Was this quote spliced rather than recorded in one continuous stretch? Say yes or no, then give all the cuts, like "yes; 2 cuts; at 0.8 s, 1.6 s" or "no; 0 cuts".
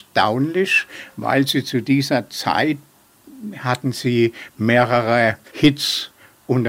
no; 0 cuts